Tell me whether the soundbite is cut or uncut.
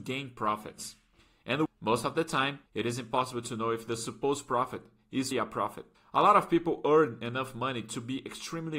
cut